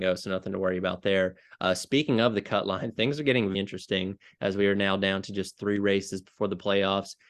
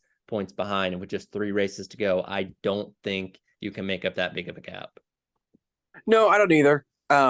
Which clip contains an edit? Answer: first; 1 cut; at 3.5 s

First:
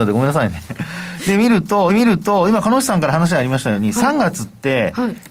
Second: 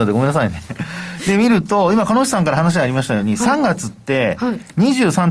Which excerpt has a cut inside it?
first; 1 cut; at 1.9 s

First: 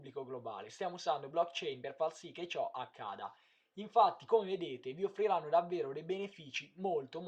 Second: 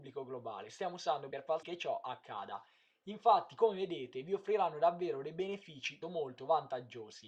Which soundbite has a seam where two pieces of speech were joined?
second; 3 cuts; at 1.3 s, 1.6 s, 6.0 s

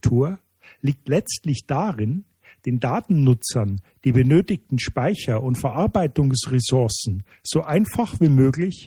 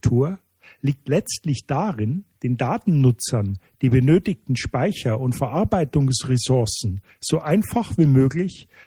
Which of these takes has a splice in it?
second; 1 cut; at 2.3 s

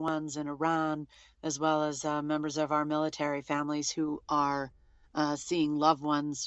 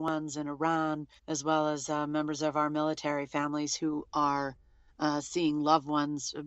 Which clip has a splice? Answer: second; 1 cut; at 1.2 s

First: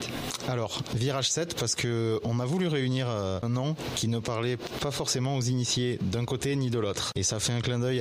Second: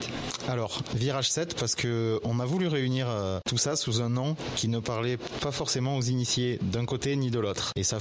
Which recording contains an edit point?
first; 1 cut; at 3.4 s

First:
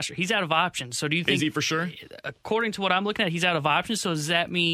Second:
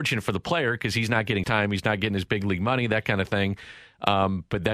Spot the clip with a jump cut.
second; 1 cut; at 1.4 s

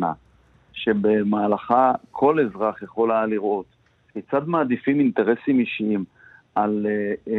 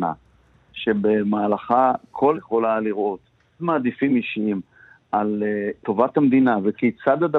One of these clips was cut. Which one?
second; 4 cuts; at 2.3 s, 3.6 s, 4.1 s, 5.8 s

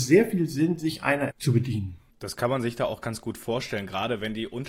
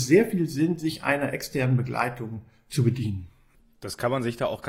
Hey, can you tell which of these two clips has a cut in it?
first; 2 cuts; at 1.3 s, 2.1 s

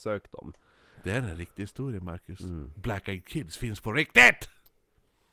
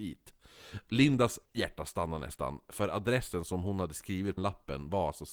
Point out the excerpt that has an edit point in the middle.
second; 2 cuts; at 1.5 s, 4.4 s

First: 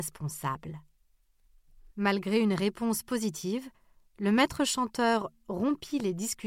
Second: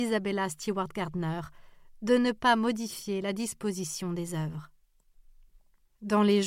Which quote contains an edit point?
first; 1 cut; at 1.9 s

